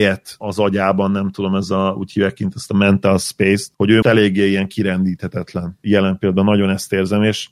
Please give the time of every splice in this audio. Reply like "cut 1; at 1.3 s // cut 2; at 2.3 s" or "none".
cut 1; at 4.0 s